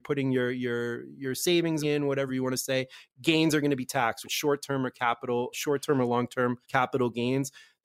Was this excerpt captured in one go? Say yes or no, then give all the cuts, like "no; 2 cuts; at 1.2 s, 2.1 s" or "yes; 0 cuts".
no; 5 cuts; at 1.8 s, 2.3 s, 4.2 s, 5.5 s, 6.6 s